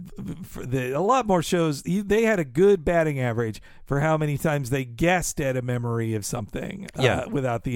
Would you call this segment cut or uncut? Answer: uncut